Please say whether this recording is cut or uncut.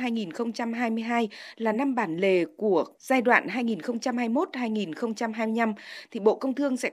uncut